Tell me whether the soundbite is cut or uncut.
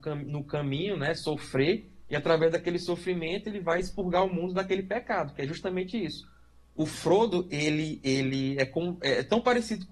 uncut